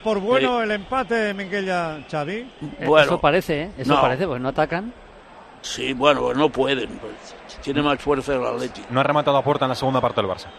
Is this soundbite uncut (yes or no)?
yes